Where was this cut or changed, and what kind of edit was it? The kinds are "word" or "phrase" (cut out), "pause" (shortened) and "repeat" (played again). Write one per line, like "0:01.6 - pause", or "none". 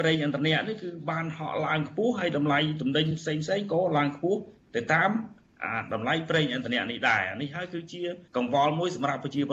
0:08.3 - pause